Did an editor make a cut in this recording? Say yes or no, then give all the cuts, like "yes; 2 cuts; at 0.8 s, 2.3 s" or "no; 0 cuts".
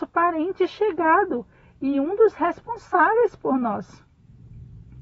no; 0 cuts